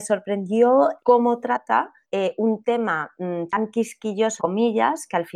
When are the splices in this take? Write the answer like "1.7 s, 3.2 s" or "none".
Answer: 1.0 s, 2.0 s, 4.4 s